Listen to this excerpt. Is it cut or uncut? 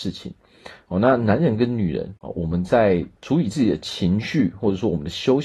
cut